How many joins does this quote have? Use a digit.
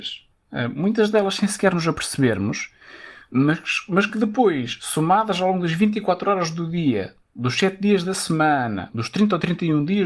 0